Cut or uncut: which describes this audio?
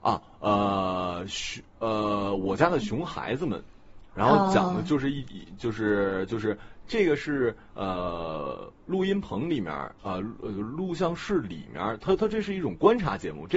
uncut